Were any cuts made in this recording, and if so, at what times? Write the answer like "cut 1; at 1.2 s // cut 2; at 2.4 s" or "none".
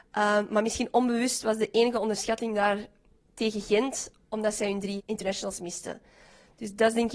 cut 1; at 5.0 s

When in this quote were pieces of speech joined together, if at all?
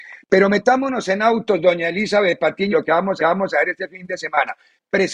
cut 1; at 2.7 s // cut 2; at 3.2 s

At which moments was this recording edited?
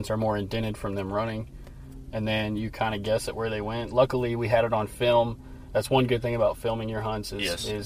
none

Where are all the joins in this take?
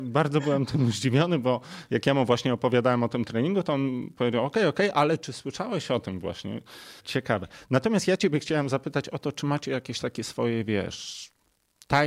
cut 1; at 7.0 s

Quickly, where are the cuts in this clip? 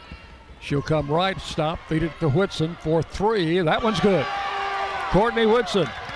cut 1; at 1.4 s // cut 2; at 2.1 s

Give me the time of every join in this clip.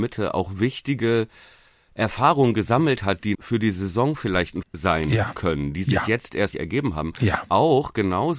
cut 1; at 3.3 s // cut 2; at 4.6 s // cut 3; at 6.5 s

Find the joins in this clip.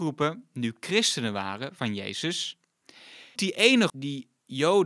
cut 1; at 1.8 s // cut 2; at 3.4 s // cut 3; at 3.9 s

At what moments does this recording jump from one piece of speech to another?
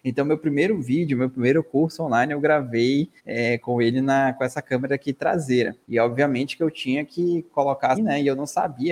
cut 1; at 3.2 s // cut 2; at 5.8 s // cut 3; at 7.9 s

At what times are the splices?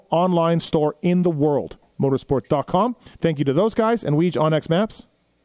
cut 1; at 3.1 s

